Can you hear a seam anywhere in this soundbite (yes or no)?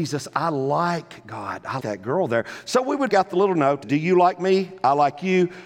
yes